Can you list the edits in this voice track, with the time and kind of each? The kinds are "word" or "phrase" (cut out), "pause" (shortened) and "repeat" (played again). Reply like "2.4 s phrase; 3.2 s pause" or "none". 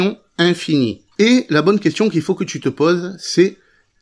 1.1 s pause